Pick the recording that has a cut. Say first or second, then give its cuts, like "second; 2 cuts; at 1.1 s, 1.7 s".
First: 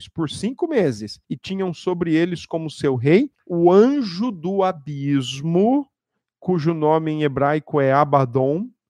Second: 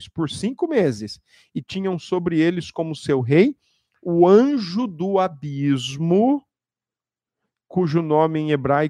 first; 3 cuts; at 1.2 s, 3.4 s, 6.0 s